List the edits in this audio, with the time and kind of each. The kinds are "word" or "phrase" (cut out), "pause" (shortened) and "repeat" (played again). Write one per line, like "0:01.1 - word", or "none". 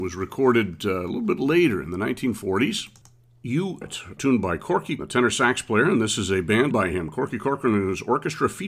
0:03.8 - word
0:04.2 - word
0:05.0 - word
0:06.7 - word

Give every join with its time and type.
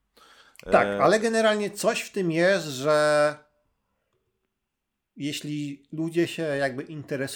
none

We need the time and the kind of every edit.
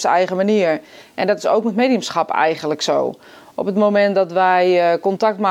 none

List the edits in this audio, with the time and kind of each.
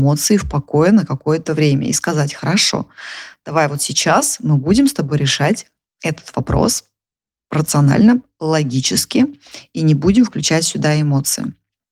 none

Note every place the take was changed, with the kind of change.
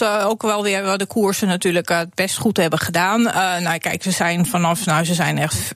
none

